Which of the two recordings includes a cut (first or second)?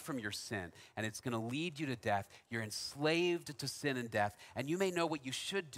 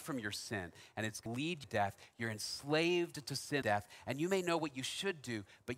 second